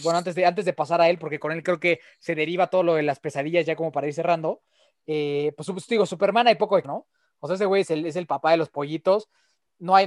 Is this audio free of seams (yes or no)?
no